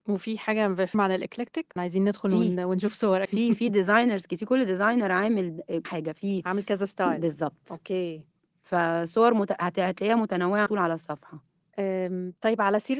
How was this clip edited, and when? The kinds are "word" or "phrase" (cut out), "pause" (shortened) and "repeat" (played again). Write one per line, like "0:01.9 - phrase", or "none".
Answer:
0:00.9 - word
0:01.8 - word
0:03.2 - word
0:05.8 - word
0:10.7 - word

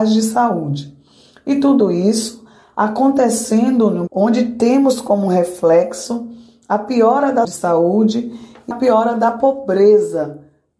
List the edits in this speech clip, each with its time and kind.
0:04.1 - word
0:07.4 - word
0:08.7 - word

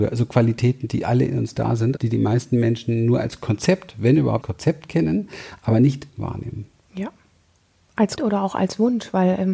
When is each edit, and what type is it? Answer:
0:02.0 - word
0:04.4 - word
0:06.1 - word
0:08.2 - word

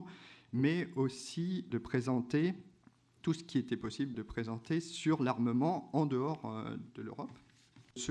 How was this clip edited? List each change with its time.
none

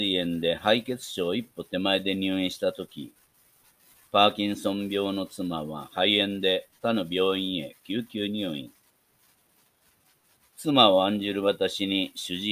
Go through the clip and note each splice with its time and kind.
none

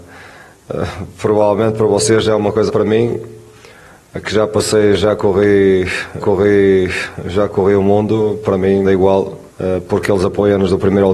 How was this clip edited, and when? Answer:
0:02.7 - word
0:06.2 - repeat
0:08.8 - phrase
0:09.5 - pause

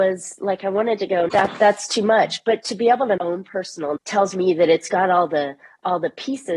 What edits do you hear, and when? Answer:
0:01.3 - word
0:03.2 - phrase
0:04.0 - word

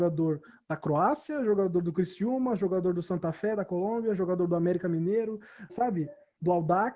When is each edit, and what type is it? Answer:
0:05.7 - word

